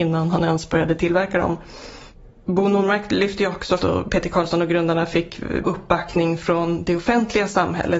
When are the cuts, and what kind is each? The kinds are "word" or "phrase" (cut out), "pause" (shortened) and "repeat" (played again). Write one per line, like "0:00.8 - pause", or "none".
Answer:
0:03.8 - phrase
0:05.6 - word